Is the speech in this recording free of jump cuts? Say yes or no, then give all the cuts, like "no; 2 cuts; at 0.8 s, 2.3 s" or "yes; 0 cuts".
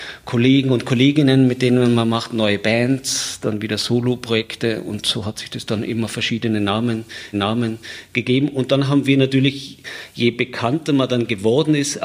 no; 1 cut; at 7.3 s